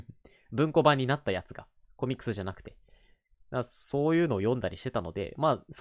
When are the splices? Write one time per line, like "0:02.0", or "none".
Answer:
none